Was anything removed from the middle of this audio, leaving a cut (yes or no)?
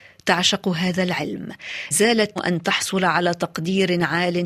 yes